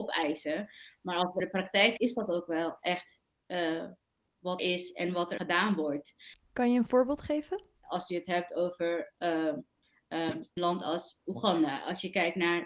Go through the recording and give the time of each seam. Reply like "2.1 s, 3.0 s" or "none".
1.4 s, 2.0 s, 4.6 s, 5.4 s, 10.6 s, 11.2 s